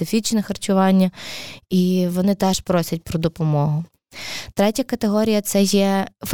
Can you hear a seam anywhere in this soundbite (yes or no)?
no